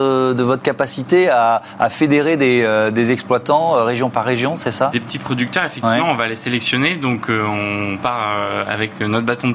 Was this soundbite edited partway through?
no; 0 cuts

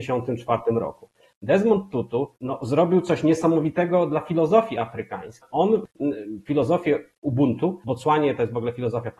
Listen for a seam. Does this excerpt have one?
no; 0 cuts

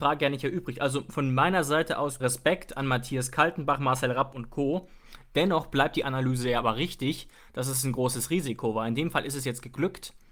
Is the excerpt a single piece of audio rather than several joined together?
no; 1 cut; at 2.2 s

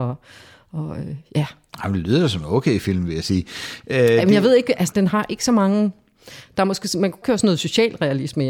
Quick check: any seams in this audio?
yes; 2 cuts; at 4.9 s, 7.2 s

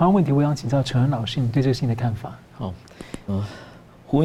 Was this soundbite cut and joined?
yes; 1 cut; at 3.3 s

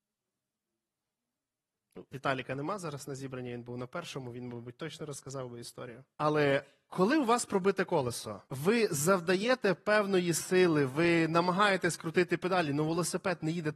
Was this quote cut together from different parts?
yes; 2 cuts; at 6.1 s, 8.5 s

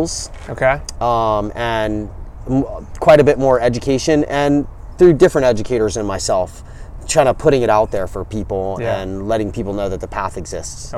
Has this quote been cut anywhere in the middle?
no; 0 cuts

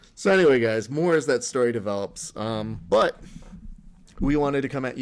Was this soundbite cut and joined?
no; 0 cuts

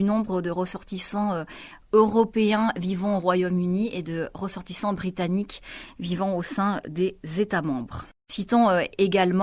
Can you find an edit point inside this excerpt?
no; 0 cuts

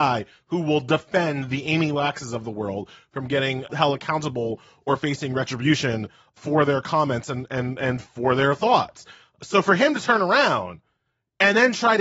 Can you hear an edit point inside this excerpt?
no; 0 cuts

